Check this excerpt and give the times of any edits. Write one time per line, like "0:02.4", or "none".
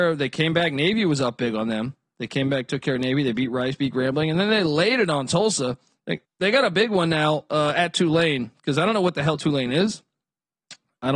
0:06.2